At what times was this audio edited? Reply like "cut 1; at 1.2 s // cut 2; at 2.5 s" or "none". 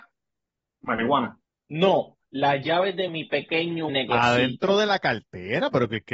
cut 1; at 1.4 s // cut 2; at 3.1 s // cut 3; at 3.9 s

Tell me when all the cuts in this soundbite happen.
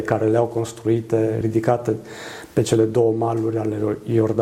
none

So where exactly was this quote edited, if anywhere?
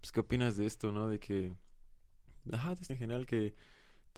cut 1; at 2.9 s

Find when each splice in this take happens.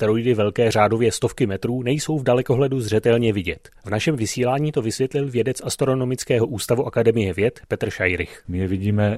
none

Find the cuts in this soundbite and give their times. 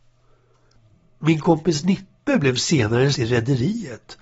cut 1; at 3.1 s

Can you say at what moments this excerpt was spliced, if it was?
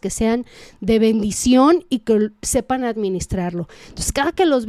none

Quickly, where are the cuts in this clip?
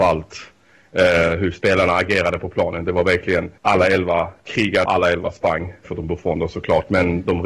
cut 1; at 3.6 s // cut 2; at 4.9 s // cut 3; at 5.8 s

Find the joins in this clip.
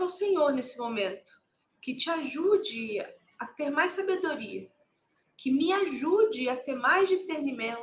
none

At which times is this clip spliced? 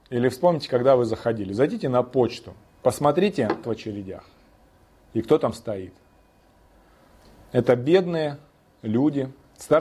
cut 1; at 3.6 s

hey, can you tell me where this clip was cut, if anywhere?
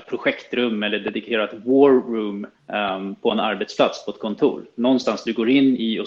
cut 1; at 2.5 s

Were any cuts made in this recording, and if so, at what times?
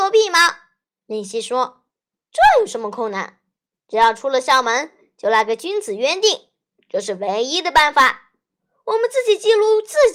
none

